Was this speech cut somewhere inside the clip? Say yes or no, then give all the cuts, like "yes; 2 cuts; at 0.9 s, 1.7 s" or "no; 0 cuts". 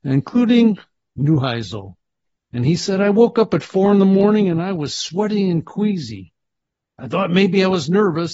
no; 0 cuts